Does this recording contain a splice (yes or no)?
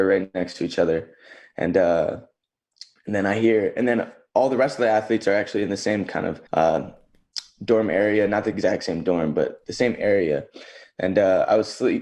yes